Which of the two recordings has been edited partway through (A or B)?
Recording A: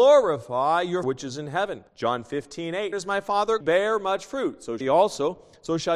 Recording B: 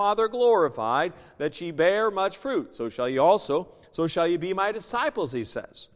A